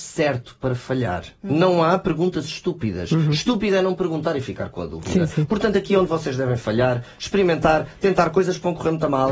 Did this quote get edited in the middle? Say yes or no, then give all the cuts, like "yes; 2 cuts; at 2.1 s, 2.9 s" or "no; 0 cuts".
no; 0 cuts